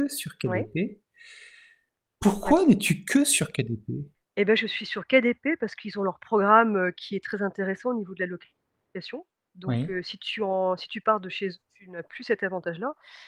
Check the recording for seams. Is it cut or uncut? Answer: uncut